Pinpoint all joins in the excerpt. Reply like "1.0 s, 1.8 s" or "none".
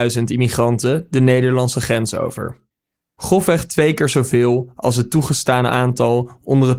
none